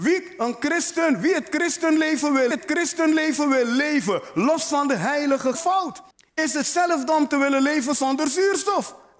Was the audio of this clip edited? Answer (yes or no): yes